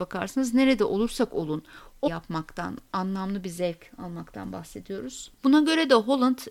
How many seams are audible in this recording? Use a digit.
1